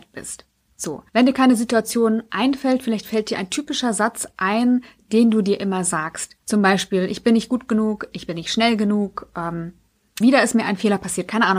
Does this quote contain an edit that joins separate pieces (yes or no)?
yes